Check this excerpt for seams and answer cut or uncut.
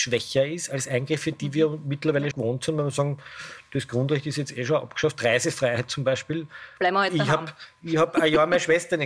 cut